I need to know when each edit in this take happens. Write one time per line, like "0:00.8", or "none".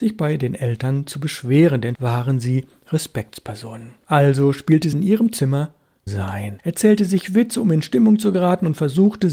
0:01.9
0:04.9
0:06.1